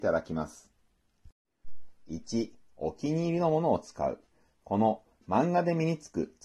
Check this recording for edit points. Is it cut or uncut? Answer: uncut